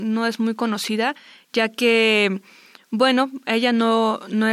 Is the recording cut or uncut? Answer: uncut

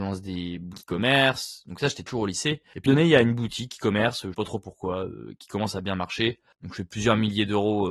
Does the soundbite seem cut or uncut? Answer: cut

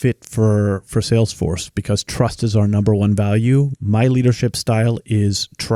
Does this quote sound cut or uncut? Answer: uncut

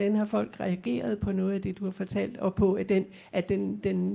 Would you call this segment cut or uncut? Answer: uncut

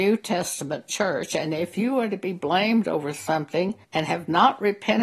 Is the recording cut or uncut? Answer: cut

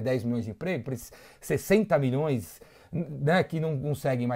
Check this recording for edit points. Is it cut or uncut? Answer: uncut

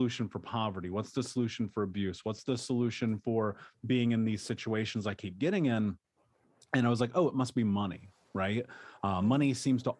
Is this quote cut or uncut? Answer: uncut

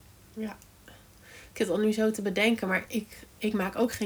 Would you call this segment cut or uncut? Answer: uncut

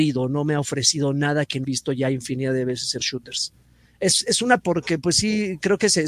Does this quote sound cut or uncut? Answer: cut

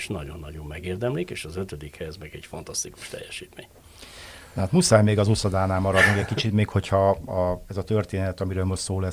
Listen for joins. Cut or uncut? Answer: uncut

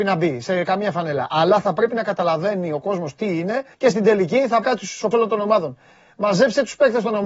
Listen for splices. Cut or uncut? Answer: cut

